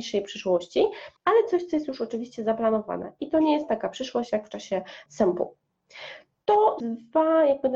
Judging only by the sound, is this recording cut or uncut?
cut